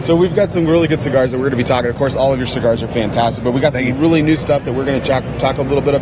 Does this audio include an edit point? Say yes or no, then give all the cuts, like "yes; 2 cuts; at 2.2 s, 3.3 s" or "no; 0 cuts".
no; 0 cuts